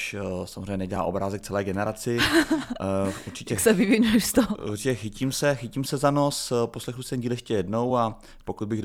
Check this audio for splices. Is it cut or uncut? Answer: uncut